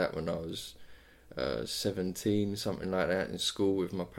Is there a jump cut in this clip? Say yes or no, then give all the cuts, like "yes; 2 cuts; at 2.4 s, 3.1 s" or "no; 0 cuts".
no; 0 cuts